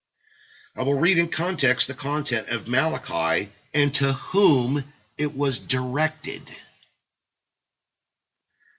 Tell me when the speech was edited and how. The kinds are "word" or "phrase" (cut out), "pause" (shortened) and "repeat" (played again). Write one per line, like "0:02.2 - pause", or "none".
none